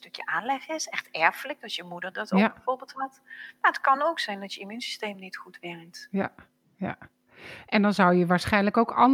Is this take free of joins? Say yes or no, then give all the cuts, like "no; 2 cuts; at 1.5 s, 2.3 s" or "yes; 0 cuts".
yes; 0 cuts